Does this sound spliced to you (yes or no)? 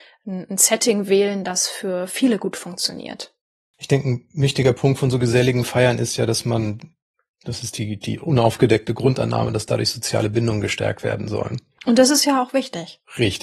no